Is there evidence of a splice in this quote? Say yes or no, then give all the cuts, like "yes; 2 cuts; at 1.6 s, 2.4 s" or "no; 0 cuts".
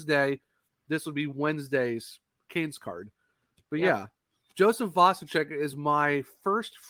no; 0 cuts